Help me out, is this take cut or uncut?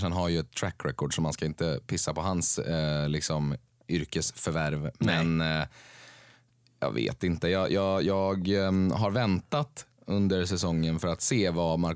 uncut